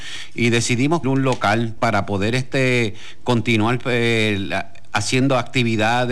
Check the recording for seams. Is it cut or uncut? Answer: cut